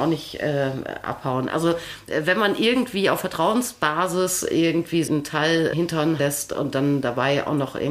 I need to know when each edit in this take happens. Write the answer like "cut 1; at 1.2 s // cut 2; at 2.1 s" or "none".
cut 1; at 5.1 s // cut 2; at 5.7 s // cut 3; at 6.2 s

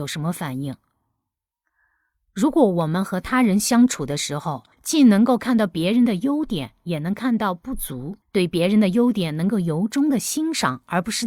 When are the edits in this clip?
cut 1; at 4.7 s // cut 2; at 8.2 s

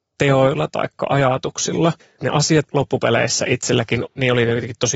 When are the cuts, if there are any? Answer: cut 1; at 2.0 s // cut 2; at 2.6 s // cut 3; at 4.1 s

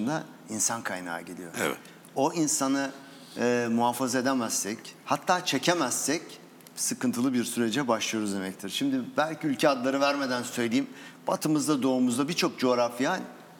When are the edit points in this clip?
cut 1; at 5.0 s

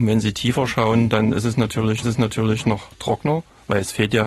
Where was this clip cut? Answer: cut 1; at 2.0 s

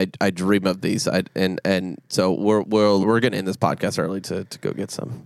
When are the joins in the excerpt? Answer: cut 1; at 3.0 s

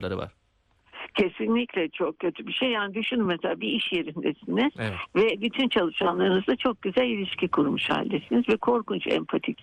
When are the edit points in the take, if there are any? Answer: none

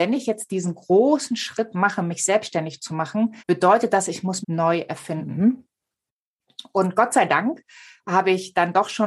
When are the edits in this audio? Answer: cut 1; at 3.4 s // cut 2; at 4.4 s

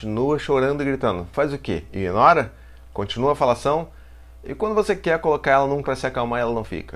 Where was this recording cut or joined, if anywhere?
cut 1; at 5.8 s

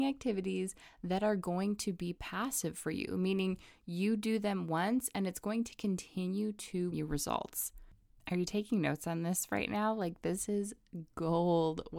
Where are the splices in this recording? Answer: cut 1; at 6.9 s

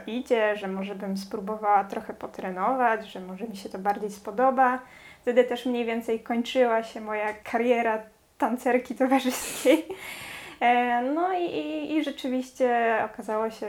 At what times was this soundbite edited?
cut 1; at 7.4 s

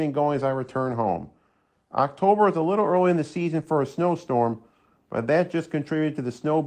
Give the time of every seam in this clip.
none

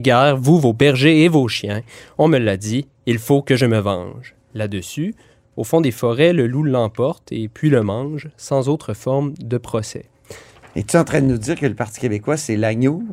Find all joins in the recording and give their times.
none

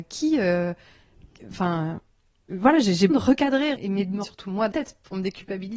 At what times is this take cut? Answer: cut 1; at 2.5 s // cut 2; at 3.1 s // cut 3; at 3.7 s // cut 4; at 4.2 s // cut 5; at 4.7 s

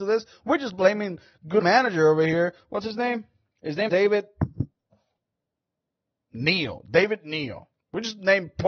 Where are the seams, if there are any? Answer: cut 1; at 1.6 s // cut 2; at 3.5 s // cut 3; at 3.9 s // cut 4; at 7.8 s

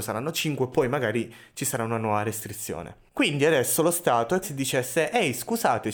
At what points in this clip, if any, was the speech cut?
cut 1; at 4.4 s

